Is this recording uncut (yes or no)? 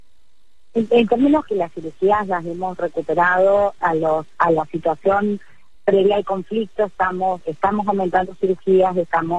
no